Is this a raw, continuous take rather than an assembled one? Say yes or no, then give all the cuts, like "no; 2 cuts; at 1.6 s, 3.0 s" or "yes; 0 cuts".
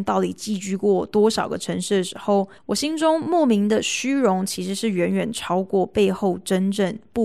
no; 1 cut; at 2.6 s